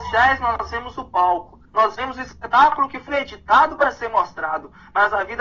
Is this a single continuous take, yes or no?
no